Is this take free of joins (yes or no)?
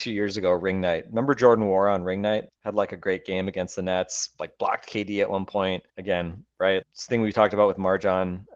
no